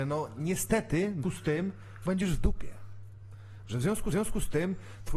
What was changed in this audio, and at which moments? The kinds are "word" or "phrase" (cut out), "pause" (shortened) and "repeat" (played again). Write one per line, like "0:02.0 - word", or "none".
0:01.2 - word
0:02.1 - word
0:04.1 - repeat